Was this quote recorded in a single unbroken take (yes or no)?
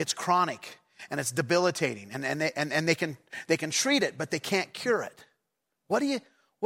yes